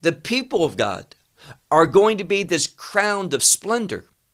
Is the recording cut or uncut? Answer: uncut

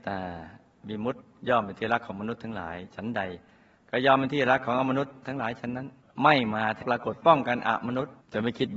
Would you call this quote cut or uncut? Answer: uncut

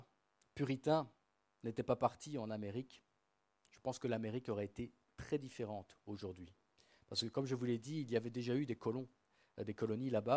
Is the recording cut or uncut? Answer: uncut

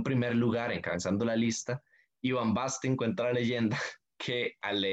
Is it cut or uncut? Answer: uncut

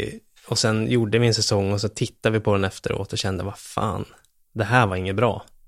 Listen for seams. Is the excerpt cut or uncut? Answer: uncut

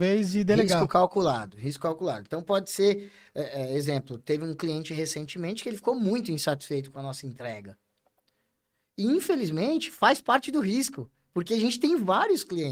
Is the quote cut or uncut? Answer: uncut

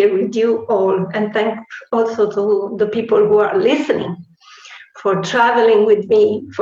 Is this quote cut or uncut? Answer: uncut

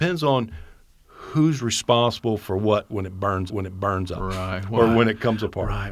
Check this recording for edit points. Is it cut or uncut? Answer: cut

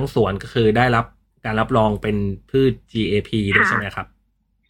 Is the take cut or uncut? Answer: uncut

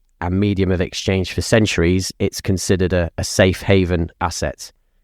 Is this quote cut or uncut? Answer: uncut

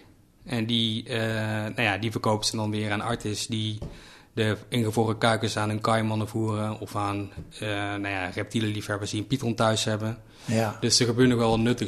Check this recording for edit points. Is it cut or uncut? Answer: uncut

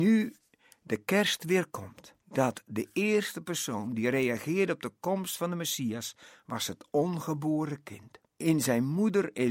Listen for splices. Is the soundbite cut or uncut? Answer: cut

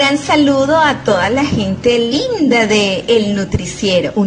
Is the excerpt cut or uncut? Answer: uncut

